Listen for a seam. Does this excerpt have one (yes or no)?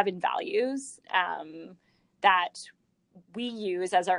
no